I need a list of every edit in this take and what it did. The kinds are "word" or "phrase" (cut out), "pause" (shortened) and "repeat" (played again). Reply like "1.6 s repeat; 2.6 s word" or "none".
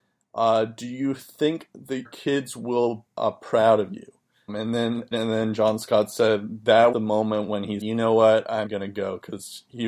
2.0 s word; 3.1 s word; 4.5 s word; 5.1 s word; 6.9 s word; 7.8 s word; 8.7 s word